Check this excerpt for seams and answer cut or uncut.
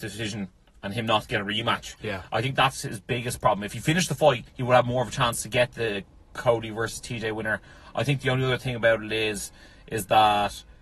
cut